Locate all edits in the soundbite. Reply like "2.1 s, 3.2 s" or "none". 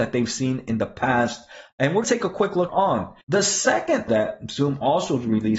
2.0 s, 2.7 s, 3.2 s, 4.1 s